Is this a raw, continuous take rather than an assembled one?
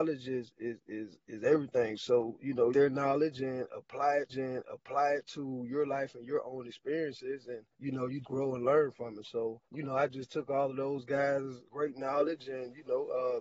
no; 6 cuts; at 2.7 s, 4.3 s, 7.7 s, 8.2 s, 9.7 s, 11.7 s

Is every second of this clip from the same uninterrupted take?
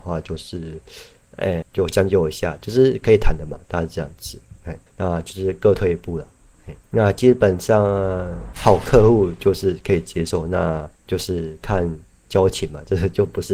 no; 5 cuts; at 1.6 s, 4.9 s, 6.8 s, 8.5 s, 11.0 s

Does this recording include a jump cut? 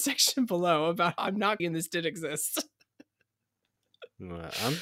yes; 2 cuts; at 1.2 s, 1.6 s

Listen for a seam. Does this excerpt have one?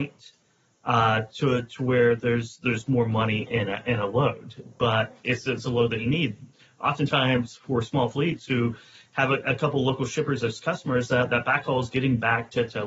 no; 0 cuts

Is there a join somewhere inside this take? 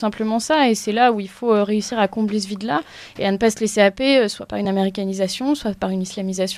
no; 0 cuts

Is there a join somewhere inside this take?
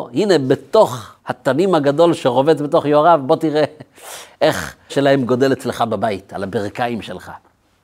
yes; 2 cuts; at 1.2 s, 4.9 s

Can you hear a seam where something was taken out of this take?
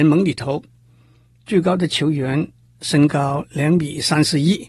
no; 0 cuts

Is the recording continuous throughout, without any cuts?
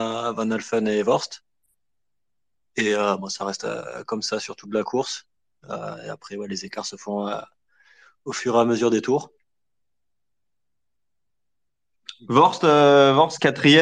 yes; 0 cuts

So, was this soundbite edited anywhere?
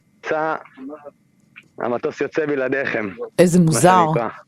yes; 1 cut; at 3.3 s

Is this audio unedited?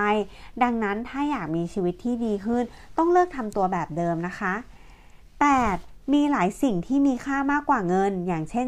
no; 1 cut; at 5.2 s

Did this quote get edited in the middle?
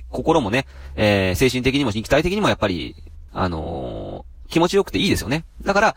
yes; 1 cut; at 3.3 s

